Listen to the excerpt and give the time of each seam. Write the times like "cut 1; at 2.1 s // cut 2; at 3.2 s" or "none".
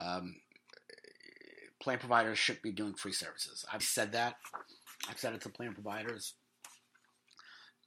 cut 1; at 3.8 s